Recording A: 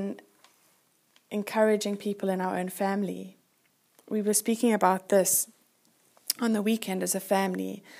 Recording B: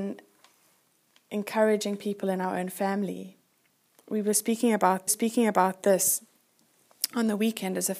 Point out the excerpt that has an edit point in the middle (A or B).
B